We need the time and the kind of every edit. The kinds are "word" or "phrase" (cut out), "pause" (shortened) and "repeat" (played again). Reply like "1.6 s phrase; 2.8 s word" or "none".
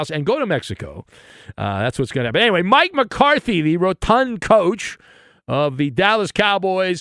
none

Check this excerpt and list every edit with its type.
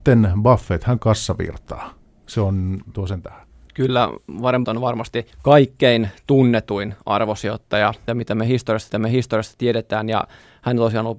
1.0 s word; 2.9 s word; 4.6 s word; 5.3 s pause; 8.1 s word; 8.9 s repeat

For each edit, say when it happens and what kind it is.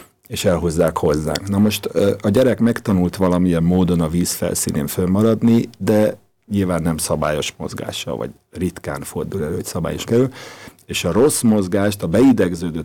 10.1 s word

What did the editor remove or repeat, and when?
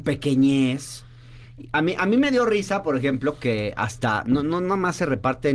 none

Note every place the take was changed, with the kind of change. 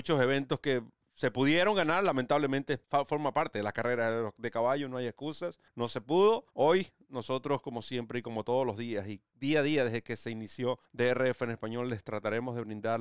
2.8 s pause; 5.7 s pause; 6.5 s pause; 10.9 s pause

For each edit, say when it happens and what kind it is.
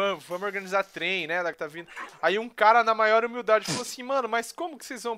1.5 s word

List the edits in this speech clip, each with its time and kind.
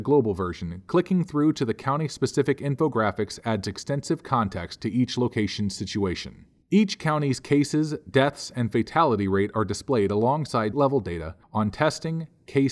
10.7 s word; 11.4 s pause

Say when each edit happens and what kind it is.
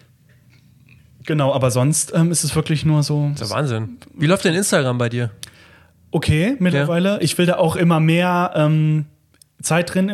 none

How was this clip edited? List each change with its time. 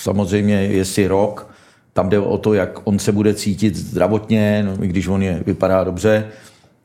none

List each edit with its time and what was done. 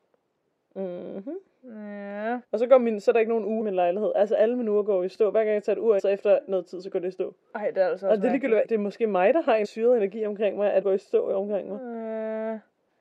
2.4 s pause; 3.6 s phrase; 6.0 s phrase; 8.6 s phrase; 9.6 s word; 10.8 s word

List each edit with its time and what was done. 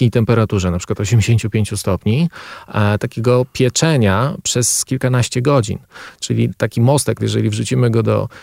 4.9 s word; 7.2 s phrase

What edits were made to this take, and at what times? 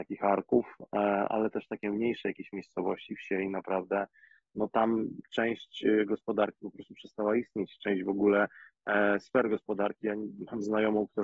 none

